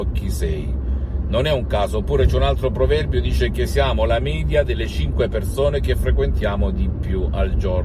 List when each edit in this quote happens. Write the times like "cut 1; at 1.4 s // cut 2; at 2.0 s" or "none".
none